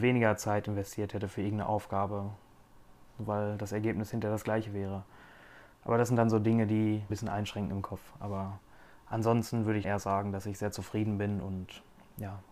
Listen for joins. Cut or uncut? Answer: cut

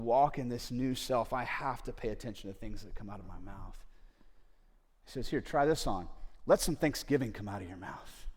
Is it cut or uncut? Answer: uncut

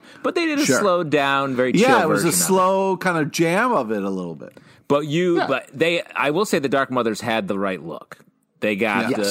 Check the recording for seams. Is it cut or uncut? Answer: uncut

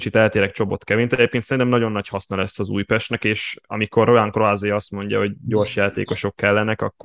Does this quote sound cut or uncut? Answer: uncut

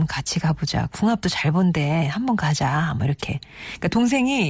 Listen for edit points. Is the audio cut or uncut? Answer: uncut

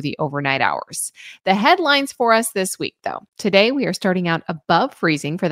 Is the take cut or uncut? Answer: cut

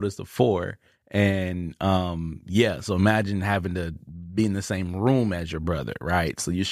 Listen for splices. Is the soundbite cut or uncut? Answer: uncut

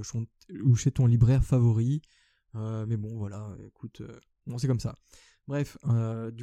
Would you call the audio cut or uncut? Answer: uncut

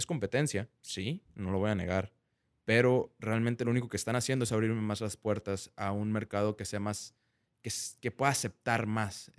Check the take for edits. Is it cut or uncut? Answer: uncut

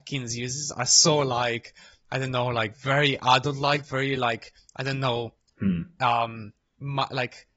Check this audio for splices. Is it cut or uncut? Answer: uncut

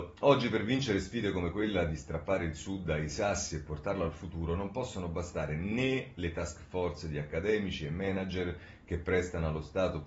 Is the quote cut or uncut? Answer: uncut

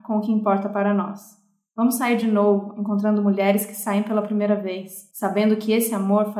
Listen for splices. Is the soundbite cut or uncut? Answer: uncut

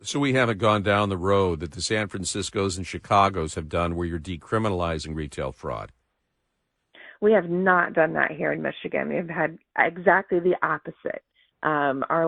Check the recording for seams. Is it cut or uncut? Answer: uncut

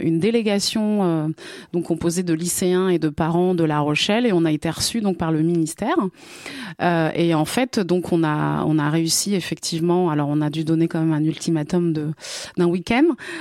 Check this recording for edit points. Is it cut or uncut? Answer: uncut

